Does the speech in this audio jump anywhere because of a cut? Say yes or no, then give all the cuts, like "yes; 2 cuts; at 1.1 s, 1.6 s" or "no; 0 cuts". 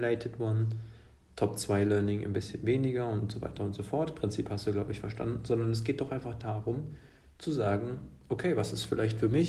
no; 0 cuts